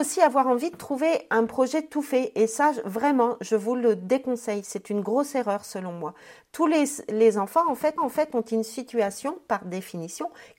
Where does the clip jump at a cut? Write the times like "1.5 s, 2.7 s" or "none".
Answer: 8.0 s